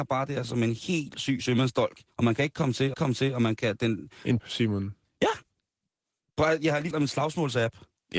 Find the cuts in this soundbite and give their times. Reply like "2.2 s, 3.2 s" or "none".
1.1 s, 2.1 s, 2.9 s, 4.4 s, 6.9 s